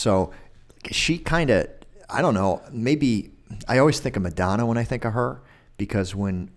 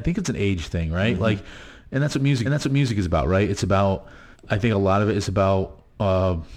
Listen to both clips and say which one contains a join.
second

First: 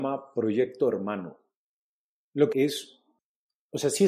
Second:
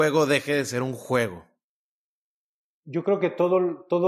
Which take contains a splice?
first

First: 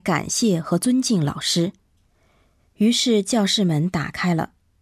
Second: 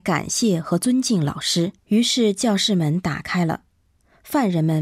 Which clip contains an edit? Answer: second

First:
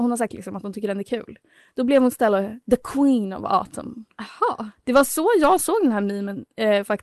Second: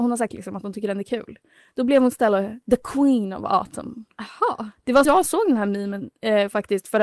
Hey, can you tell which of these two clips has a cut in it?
second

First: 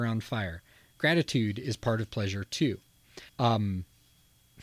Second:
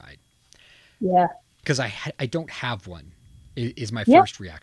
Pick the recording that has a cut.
first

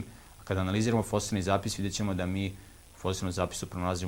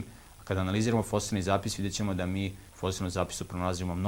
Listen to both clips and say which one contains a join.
second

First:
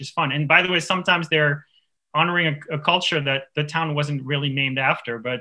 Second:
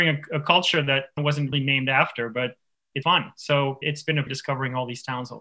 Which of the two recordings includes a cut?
second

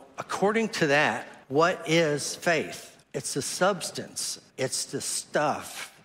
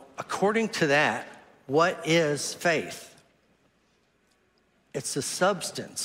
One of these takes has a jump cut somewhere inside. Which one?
first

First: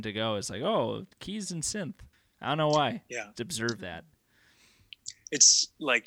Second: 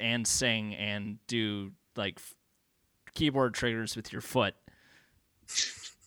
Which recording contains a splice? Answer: first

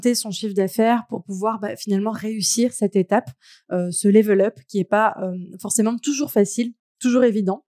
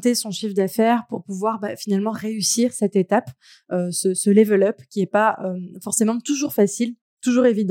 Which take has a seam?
first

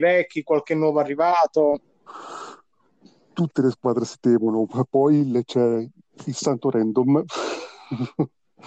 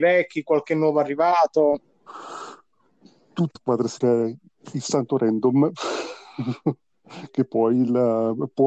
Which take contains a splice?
second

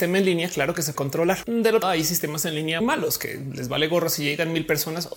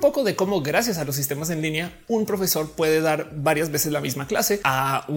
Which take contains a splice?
first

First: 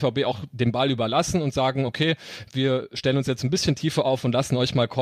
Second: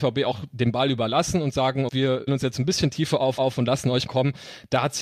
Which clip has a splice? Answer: second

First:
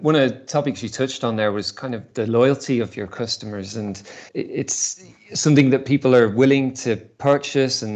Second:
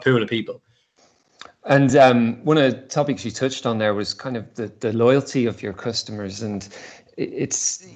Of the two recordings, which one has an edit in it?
first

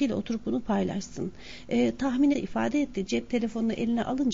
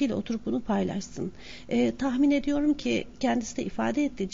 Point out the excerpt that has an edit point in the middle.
first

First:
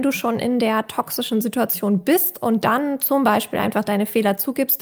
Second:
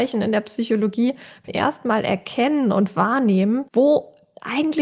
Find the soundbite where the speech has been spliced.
second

